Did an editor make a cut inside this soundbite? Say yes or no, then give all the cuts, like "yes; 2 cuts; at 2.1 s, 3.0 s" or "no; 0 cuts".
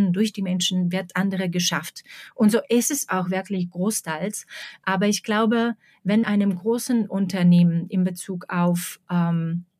yes; 2 cuts; at 1.1 s, 6.2 s